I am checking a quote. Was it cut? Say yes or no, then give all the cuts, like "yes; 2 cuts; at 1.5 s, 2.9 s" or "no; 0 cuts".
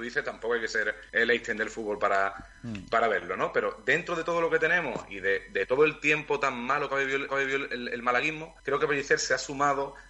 yes; 3 cuts; at 1.1 s, 7.3 s, 8.6 s